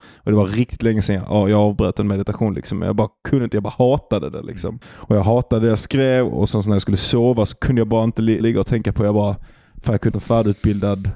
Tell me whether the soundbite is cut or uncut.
cut